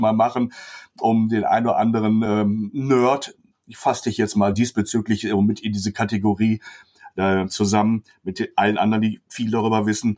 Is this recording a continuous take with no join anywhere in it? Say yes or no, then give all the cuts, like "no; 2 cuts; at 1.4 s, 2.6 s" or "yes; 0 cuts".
yes; 0 cuts